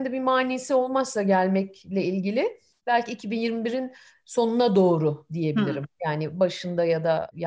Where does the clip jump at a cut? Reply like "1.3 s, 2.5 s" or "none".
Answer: none